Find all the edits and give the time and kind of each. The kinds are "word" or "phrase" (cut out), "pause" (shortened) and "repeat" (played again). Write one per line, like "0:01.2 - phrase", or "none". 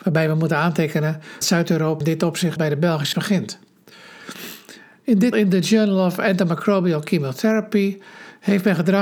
0:01.4 - word
0:02.0 - word
0:02.6 - word
0:03.1 - word
0:05.3 - word